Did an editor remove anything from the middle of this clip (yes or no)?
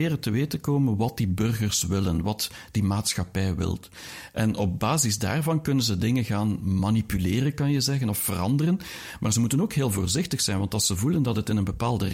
no